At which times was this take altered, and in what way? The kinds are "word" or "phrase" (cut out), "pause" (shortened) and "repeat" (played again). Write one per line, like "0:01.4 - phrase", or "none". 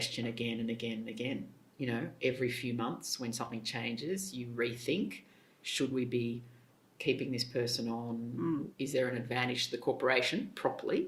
none

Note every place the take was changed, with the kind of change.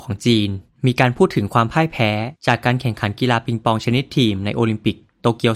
none

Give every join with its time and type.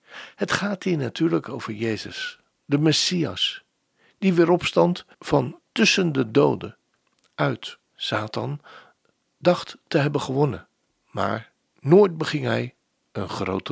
0:05.1 - pause
0:07.9 - pause
0:10.8 - pause

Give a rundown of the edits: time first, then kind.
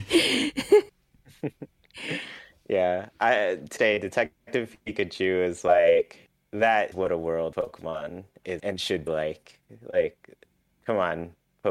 0:03.8 - word
0:06.9 - word
0:07.5 - word
0:08.6 - word
0:09.1 - word

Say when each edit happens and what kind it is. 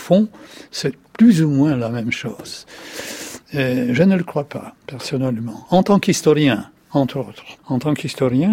0:04.8 - pause
0:06.8 - pause
0:07.6 - pause

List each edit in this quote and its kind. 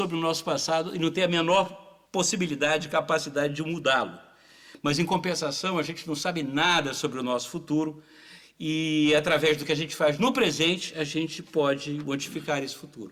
0:02.1 - pause

